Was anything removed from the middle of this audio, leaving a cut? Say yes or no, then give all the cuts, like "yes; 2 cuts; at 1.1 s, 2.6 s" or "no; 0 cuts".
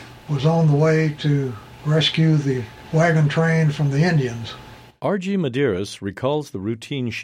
yes; 1 cut; at 4.9 s